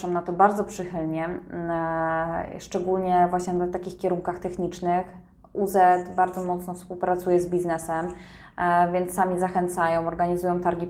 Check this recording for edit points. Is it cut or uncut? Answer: uncut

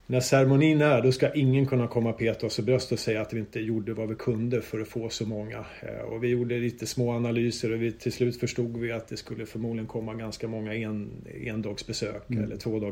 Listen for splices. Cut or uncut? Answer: uncut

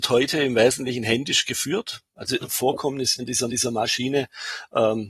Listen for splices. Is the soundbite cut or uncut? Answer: cut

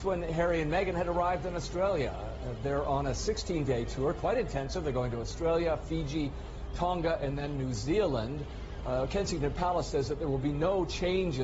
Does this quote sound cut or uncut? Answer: uncut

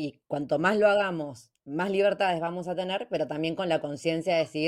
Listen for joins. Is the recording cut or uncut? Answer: uncut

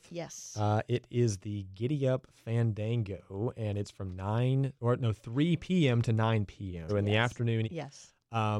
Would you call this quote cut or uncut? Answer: cut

